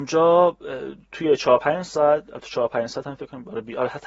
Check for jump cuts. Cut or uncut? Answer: uncut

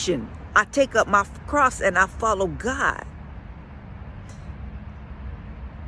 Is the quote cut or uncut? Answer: uncut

